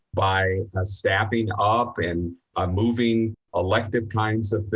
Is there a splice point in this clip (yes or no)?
no